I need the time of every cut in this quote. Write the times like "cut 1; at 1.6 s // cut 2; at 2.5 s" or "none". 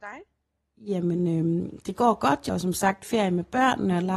cut 1; at 2.5 s